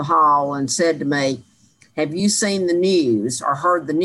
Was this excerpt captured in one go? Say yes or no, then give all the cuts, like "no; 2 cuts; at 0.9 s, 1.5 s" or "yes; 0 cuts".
yes; 0 cuts